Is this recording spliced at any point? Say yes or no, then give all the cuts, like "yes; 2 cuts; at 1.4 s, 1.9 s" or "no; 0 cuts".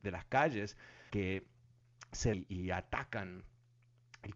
yes; 2 cuts; at 1.1 s, 2.3 s